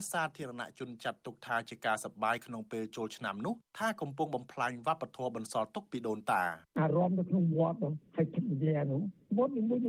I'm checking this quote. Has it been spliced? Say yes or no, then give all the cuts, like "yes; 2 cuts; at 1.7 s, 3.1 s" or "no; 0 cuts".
yes; 2 cuts; at 3.7 s, 6.7 s